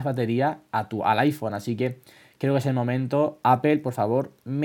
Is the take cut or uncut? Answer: uncut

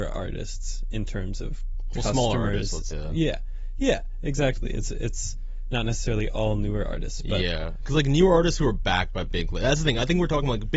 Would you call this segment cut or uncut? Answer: cut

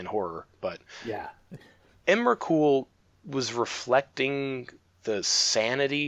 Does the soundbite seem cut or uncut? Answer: uncut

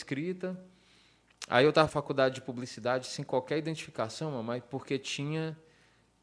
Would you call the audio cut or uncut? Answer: cut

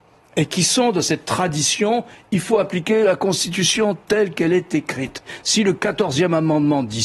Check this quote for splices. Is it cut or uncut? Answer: uncut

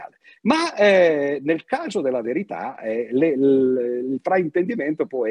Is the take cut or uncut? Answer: uncut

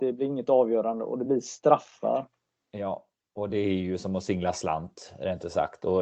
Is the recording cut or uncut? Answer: uncut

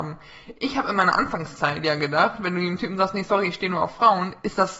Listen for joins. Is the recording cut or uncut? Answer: uncut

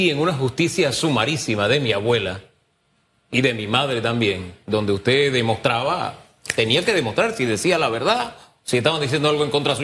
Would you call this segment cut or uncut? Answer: uncut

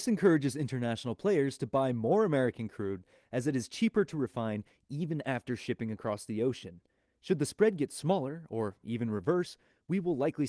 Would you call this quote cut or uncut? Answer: uncut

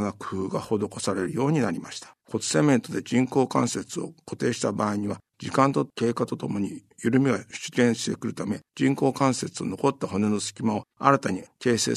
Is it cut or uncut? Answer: cut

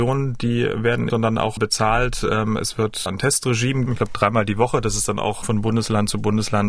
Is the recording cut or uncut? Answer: cut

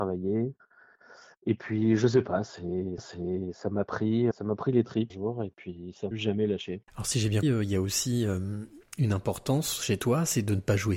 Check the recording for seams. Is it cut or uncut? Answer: cut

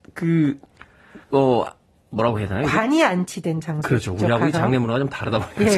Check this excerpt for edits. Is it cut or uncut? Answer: cut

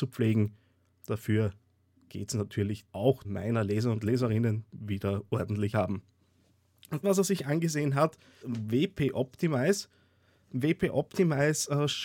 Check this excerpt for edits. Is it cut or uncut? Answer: cut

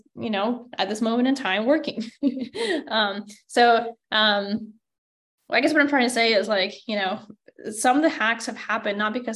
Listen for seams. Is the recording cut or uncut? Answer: uncut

